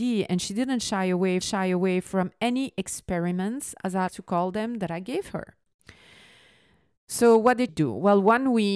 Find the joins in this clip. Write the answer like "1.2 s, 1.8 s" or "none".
1.4 s, 4.1 s, 7.7 s